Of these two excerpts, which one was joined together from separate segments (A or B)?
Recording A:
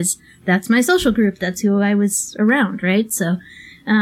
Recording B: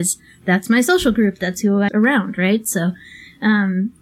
B